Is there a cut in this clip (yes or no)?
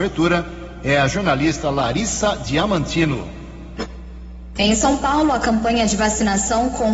no